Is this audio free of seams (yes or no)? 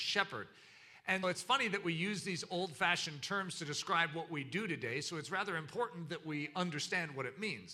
no